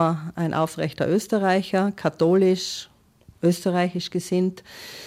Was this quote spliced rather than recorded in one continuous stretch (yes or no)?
no